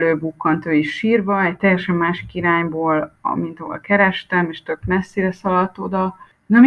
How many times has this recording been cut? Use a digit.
0